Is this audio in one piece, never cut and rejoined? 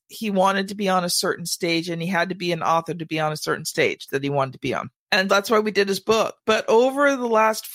no; 1 cut; at 5.3 s

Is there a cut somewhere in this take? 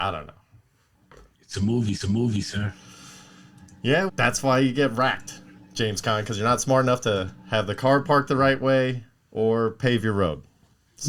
yes; 2 cuts; at 2.0 s, 4.1 s

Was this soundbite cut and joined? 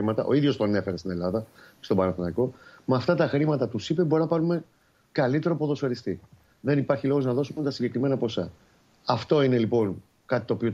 no; 0 cuts

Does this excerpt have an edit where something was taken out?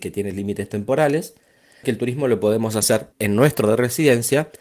yes; 3 cuts; at 1.8 s, 3.1 s, 3.6 s

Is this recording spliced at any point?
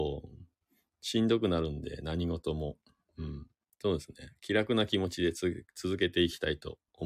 no; 0 cuts

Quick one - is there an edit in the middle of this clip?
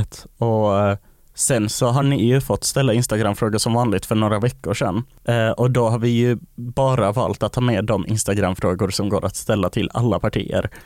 no; 0 cuts

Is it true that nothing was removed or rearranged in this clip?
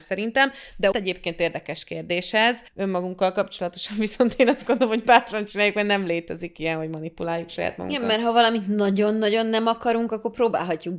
no; 2 cuts; at 0.9 s, 2.7 s

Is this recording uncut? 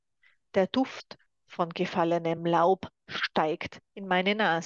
yes; 0 cuts

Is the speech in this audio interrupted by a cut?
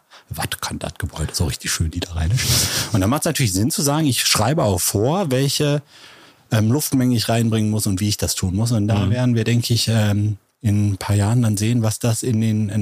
no; 0 cuts

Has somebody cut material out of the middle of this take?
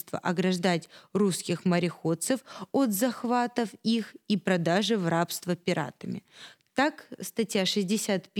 no; 0 cuts

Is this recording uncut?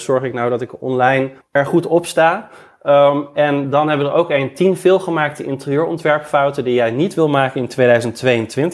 no; 1 cut; at 1.4 s

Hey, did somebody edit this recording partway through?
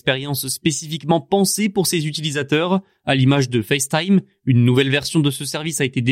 no; 0 cuts

